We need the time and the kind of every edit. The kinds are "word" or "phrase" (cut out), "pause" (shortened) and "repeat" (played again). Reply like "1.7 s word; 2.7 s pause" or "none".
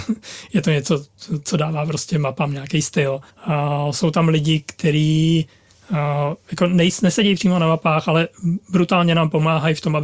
3.3 s pause